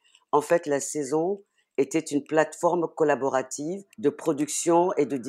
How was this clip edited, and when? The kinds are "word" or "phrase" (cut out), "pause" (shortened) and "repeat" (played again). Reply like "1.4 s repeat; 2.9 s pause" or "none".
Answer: 3.9 s pause